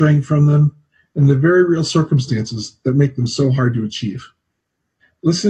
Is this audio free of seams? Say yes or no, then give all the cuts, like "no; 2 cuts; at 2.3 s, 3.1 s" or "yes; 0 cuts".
yes; 0 cuts